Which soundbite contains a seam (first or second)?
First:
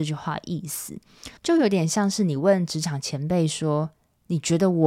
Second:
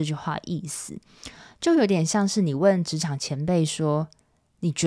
first